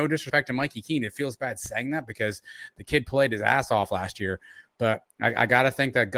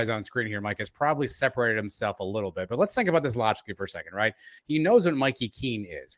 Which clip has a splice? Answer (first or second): second